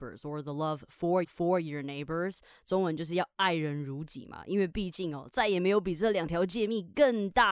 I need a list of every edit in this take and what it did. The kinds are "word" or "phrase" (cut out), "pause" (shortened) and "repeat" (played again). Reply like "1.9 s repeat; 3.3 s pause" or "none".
1.2 s repeat